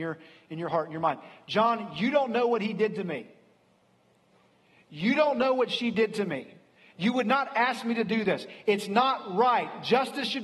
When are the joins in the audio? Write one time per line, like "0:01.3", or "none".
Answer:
none